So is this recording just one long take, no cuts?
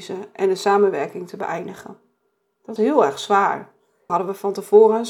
no; 2 cuts; at 2.8 s, 4.1 s

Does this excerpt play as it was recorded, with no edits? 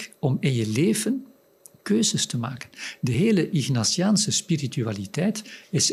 yes; 0 cuts

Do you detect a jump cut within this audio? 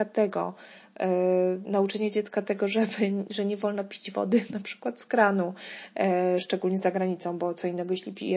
no; 0 cuts

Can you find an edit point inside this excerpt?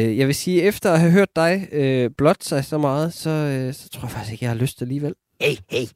no; 0 cuts

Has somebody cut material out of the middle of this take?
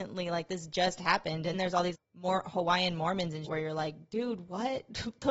yes; 3 cuts; at 1.5 s, 1.9 s, 3.5 s

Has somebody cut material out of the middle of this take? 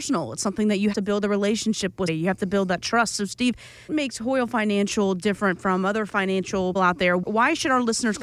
yes; 4 cuts; at 0.9 s, 2.1 s, 3.9 s, 6.8 s

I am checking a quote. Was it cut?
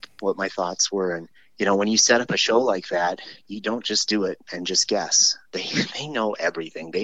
yes; 1 cut; at 1.3 s

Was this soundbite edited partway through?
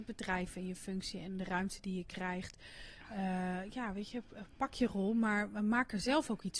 no; 0 cuts

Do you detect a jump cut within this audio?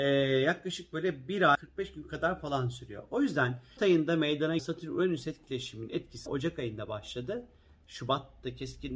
yes; 4 cuts; at 1.5 s, 3.8 s, 4.6 s, 6.3 s

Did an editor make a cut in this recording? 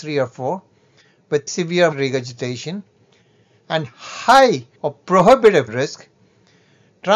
yes; 4 cuts; at 1.5 s, 1.9 s, 4.7 s, 5.7 s

